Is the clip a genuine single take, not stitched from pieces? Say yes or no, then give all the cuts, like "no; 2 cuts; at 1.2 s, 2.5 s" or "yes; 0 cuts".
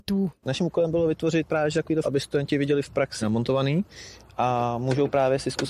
no; 2 cuts; at 2.0 s, 3.2 s